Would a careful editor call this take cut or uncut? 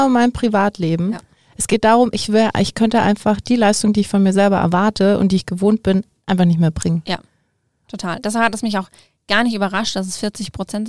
uncut